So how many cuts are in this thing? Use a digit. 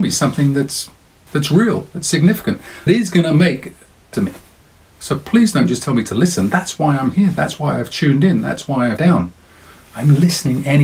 4